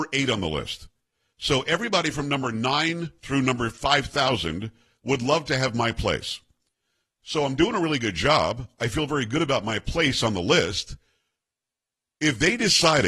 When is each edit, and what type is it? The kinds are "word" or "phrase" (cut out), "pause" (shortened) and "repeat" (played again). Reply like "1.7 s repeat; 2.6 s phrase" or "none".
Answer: none

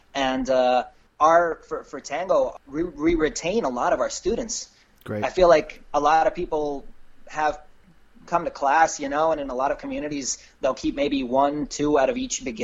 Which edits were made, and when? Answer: none

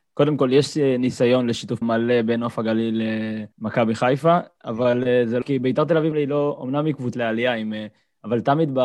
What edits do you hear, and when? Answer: 1.8 s word; 3.5 s pause; 5.4 s word; 6.1 s word; 7.1 s word

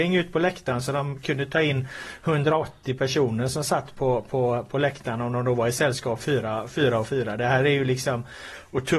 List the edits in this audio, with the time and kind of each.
none

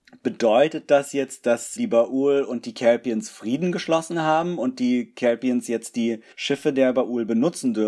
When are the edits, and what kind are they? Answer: 1.8 s word; 6.3 s pause

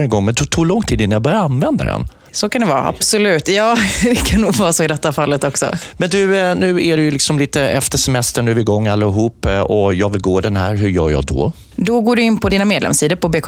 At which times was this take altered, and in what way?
none

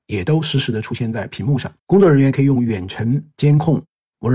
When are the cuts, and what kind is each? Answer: 1.8 s pause

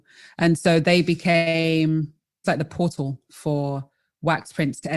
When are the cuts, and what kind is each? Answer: 2.4 s word

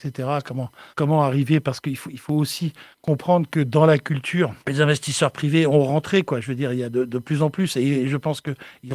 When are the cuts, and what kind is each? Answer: 0.9 s pause; 2.9 s pause; 4.6 s pause

